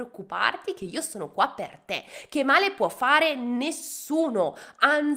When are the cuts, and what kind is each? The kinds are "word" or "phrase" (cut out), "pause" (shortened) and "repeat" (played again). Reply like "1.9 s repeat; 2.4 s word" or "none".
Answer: none